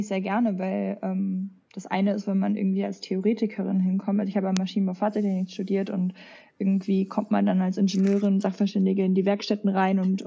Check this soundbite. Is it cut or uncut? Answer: uncut